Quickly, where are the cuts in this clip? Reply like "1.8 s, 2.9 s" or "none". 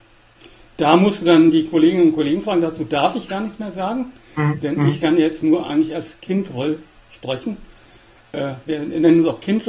none